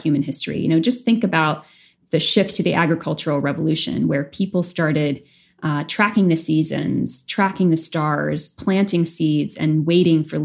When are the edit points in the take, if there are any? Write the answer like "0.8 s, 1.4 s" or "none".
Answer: none